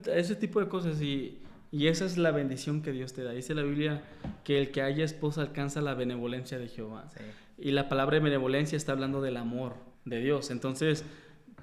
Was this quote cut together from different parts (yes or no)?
yes